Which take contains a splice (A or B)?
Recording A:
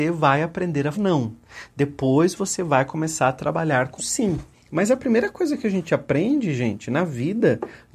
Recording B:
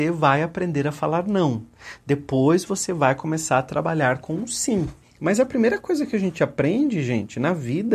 A